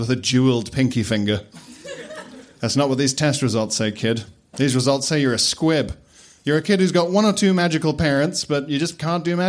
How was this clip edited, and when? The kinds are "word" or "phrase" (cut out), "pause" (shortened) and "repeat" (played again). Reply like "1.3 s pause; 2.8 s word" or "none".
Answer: none